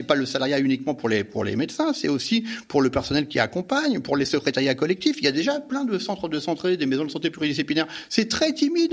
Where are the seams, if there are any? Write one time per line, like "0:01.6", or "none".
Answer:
none